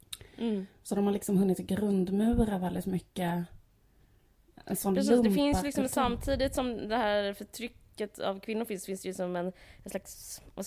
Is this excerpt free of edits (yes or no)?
yes